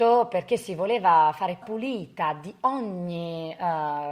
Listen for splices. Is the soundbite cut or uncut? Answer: cut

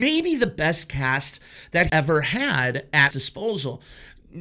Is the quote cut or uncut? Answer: cut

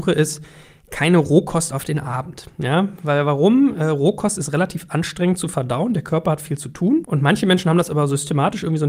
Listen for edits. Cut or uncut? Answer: uncut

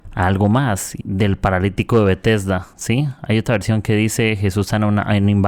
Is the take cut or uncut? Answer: cut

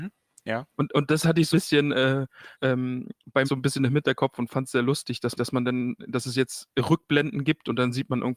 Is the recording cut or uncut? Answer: cut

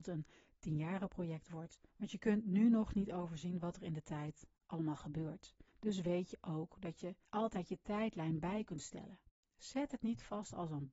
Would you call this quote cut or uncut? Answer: cut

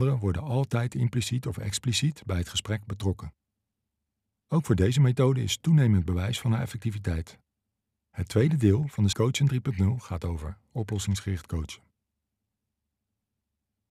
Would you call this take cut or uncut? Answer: cut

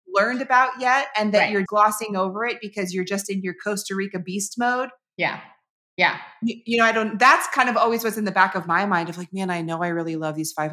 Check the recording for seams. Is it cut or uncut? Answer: cut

